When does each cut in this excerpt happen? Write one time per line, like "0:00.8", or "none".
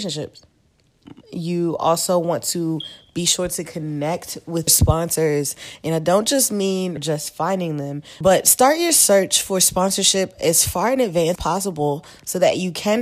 0:01.2
0:04.7
0:07.0
0:11.4